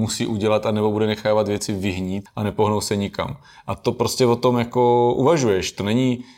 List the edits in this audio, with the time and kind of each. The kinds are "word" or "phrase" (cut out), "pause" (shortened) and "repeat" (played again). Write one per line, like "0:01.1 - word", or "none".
0:02.3 - word